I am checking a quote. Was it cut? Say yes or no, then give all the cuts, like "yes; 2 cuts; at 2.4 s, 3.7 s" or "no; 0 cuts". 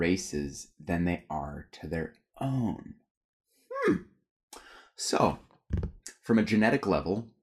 no; 0 cuts